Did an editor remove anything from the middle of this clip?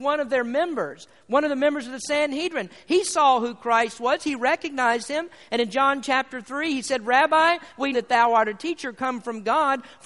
yes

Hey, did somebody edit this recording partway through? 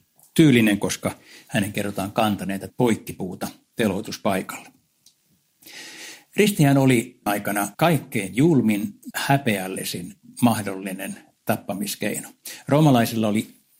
yes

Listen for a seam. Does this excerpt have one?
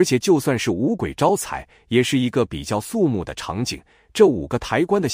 no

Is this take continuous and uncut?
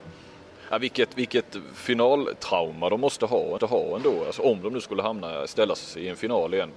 no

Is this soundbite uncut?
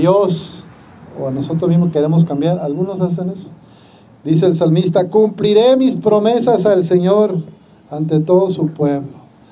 yes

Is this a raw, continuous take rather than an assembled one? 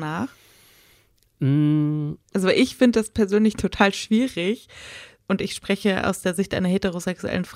no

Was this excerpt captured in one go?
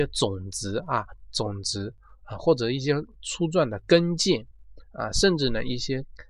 yes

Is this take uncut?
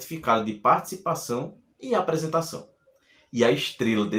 yes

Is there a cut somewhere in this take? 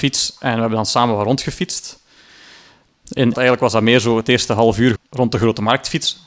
yes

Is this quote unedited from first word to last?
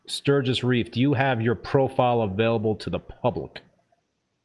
yes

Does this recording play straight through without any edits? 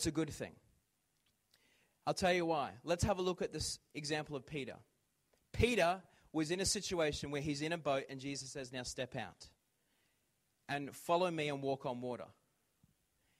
yes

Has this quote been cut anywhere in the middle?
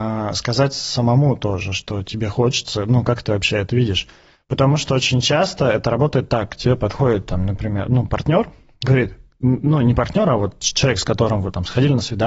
no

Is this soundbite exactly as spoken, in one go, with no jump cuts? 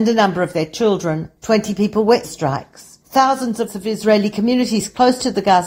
no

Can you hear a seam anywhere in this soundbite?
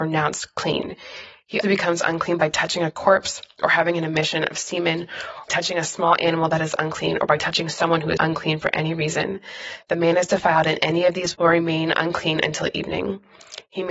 yes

